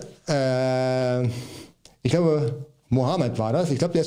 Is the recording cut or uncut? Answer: uncut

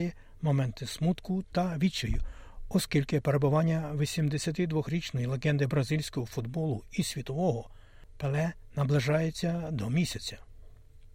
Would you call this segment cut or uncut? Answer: uncut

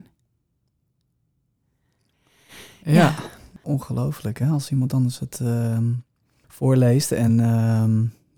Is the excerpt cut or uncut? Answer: uncut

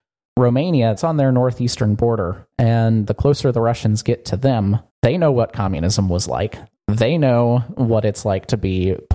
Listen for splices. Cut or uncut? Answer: cut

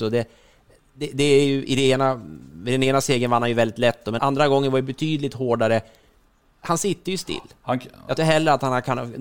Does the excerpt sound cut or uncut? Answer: cut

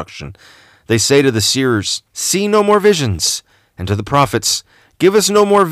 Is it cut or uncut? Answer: cut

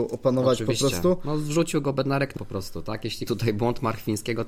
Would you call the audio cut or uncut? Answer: cut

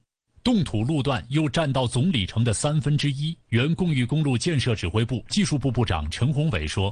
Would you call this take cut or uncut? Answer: cut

